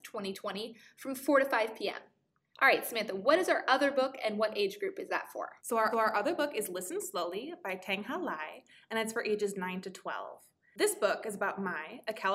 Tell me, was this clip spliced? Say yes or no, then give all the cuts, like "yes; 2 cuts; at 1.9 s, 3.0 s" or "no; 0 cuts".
yes; 2 cuts; at 5.6 s, 5.9 s